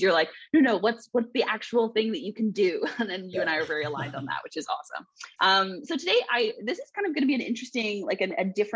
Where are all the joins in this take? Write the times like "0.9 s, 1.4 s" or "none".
5.3 s